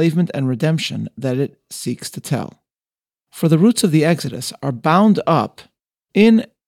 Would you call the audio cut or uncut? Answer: uncut